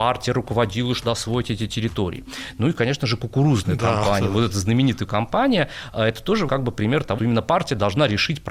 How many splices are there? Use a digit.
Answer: 4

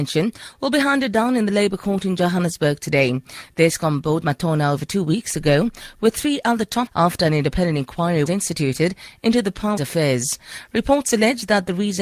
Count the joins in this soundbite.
4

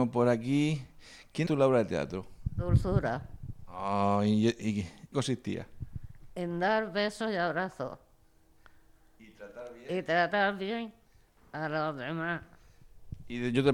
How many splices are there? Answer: 2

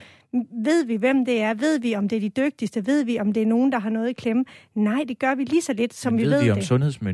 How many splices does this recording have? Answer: 0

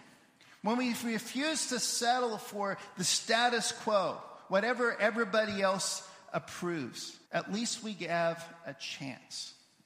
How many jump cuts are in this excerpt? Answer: 1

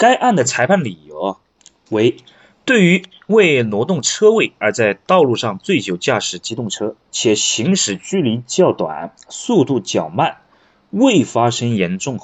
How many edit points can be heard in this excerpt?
0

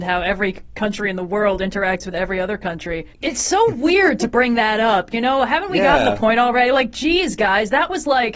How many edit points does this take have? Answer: 1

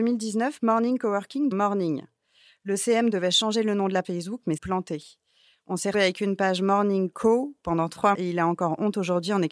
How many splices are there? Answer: 6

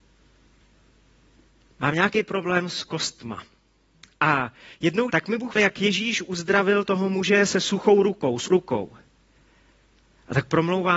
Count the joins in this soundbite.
3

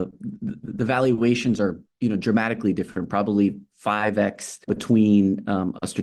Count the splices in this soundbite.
2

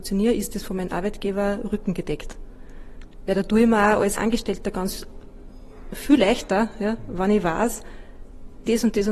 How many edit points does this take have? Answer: 1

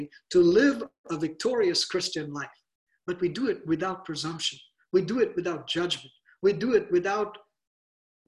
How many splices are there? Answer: 0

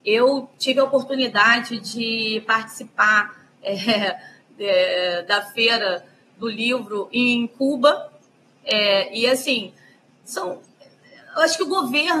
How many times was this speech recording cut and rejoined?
0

